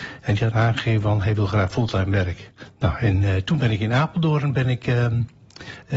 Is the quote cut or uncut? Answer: uncut